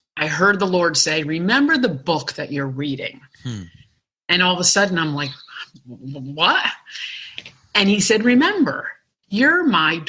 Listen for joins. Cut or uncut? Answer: uncut